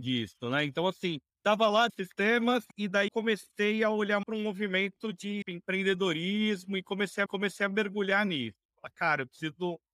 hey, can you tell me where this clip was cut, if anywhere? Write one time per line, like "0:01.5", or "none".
0:01.3
0:01.9
0:02.7
0:03.1
0:04.2
0:05.4
0:07.3